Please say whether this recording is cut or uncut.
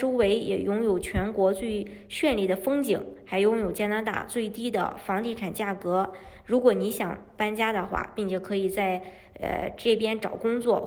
uncut